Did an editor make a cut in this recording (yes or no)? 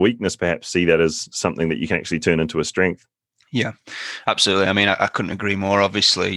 no